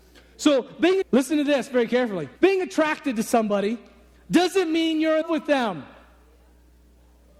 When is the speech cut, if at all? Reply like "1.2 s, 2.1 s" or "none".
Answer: 1.0 s, 2.4 s, 5.2 s